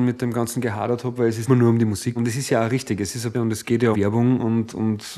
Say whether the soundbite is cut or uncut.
cut